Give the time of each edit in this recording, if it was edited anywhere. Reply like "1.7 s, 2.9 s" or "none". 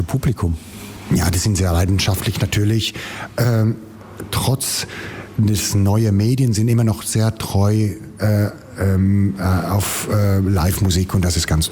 none